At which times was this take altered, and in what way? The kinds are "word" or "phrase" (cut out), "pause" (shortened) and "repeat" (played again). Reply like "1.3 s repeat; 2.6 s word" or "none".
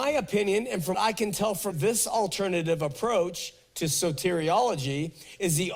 0.9 s word; 1.7 s word